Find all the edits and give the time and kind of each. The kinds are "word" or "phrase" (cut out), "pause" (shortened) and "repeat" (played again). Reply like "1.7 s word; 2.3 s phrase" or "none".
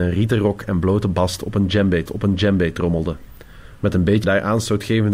2.1 s repeat; 4.2 s phrase